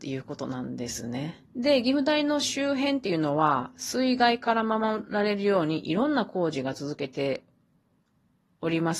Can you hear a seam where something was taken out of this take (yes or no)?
yes